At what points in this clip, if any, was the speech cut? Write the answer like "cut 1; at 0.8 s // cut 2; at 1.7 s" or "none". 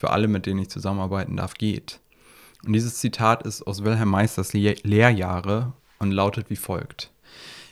none